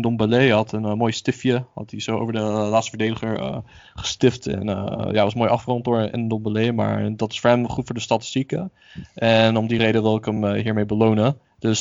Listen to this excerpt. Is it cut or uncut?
uncut